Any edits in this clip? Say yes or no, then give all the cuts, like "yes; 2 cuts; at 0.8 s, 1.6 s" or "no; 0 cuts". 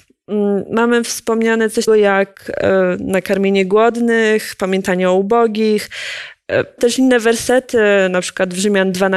yes; 2 cuts; at 1.9 s, 6.8 s